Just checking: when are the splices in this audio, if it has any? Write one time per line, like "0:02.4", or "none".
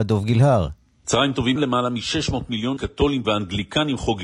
0:01.6
0:02.8
0:03.2